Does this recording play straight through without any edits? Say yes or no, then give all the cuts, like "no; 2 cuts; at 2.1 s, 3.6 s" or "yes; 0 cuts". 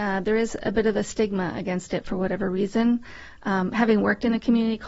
yes; 0 cuts